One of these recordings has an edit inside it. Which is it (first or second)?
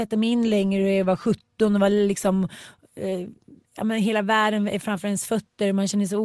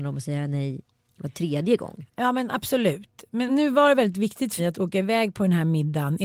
second